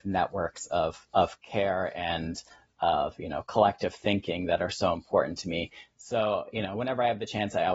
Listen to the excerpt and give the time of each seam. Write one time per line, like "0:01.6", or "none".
none